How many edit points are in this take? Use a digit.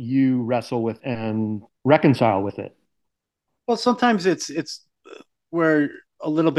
3